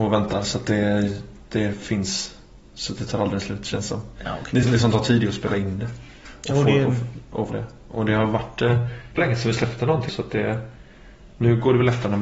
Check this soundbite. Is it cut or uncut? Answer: cut